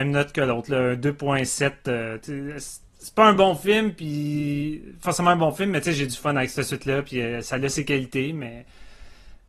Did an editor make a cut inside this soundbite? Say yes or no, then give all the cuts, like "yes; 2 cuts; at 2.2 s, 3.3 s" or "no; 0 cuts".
no; 0 cuts